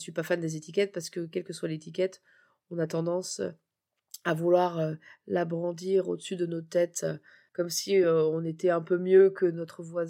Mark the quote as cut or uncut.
uncut